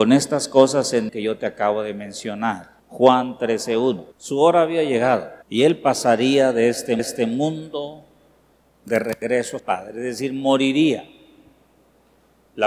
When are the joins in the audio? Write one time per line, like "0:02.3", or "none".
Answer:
0:01.1
0:02.8
0:04.1
0:05.4
0:07.0
0:09.6